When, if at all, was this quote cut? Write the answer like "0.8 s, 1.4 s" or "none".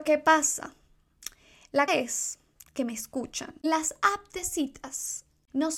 1.9 s, 2.6 s